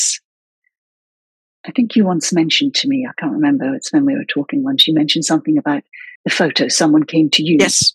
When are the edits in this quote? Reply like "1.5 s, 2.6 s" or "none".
6.1 s